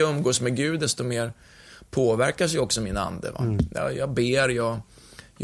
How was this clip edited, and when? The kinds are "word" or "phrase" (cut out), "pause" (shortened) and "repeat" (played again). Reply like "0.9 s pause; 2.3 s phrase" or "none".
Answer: none